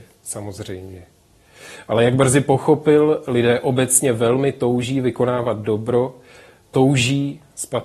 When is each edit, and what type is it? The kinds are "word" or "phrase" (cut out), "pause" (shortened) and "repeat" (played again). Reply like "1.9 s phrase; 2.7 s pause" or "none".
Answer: none